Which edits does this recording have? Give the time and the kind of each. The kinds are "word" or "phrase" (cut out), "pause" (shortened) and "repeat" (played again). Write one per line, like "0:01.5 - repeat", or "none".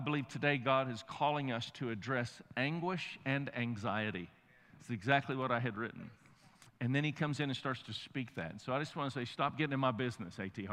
none